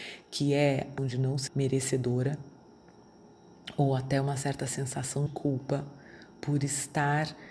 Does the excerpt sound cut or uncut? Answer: cut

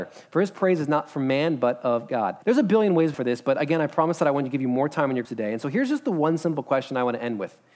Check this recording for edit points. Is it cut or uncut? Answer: cut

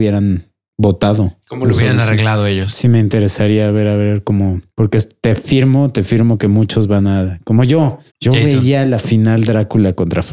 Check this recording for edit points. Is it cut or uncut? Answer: cut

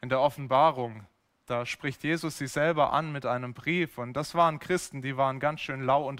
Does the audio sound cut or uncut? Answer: uncut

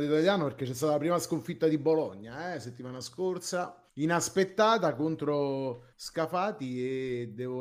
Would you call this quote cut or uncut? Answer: cut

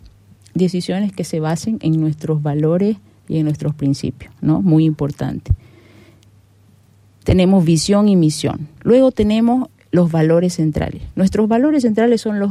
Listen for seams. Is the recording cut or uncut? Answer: uncut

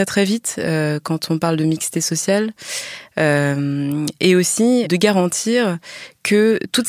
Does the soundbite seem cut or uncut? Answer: cut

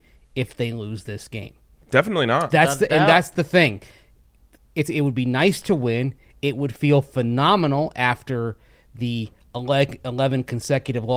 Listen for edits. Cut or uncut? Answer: uncut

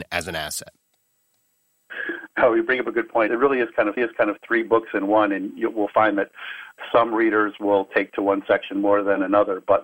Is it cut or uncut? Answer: cut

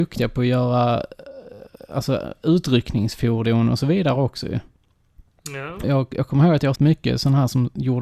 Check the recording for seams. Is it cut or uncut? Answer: cut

